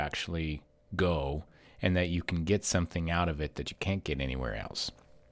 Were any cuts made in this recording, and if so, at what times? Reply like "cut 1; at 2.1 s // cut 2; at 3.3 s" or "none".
none

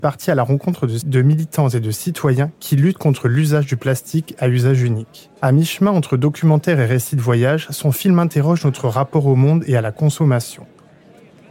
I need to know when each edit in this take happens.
cut 1; at 1.0 s // cut 2; at 5.4 s

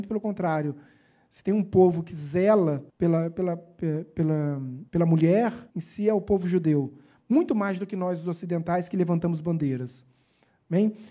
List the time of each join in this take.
cut 1; at 2.9 s // cut 2; at 4.9 s // cut 3; at 5.7 s

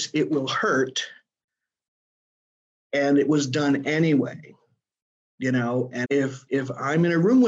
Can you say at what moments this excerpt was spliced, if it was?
cut 1; at 6.0 s

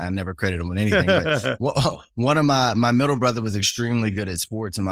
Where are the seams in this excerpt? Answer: none

